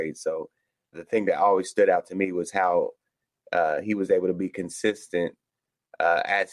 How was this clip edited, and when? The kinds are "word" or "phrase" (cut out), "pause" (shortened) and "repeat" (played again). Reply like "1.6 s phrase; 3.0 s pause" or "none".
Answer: 0.9 s word